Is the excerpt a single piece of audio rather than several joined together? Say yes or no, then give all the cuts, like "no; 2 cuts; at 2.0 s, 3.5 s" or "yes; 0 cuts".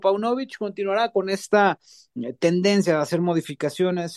yes; 0 cuts